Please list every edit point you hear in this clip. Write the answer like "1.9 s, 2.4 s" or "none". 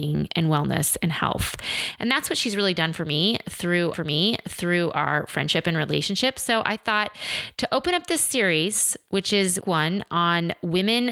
3.9 s, 9.6 s